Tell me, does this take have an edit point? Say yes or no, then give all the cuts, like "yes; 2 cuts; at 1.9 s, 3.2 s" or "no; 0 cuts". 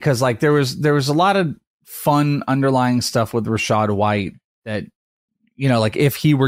no; 0 cuts